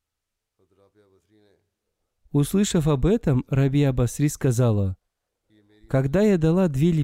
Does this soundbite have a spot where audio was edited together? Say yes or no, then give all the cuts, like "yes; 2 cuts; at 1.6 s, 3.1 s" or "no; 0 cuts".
no; 0 cuts